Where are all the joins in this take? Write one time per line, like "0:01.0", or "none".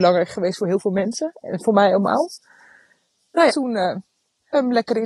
0:03.5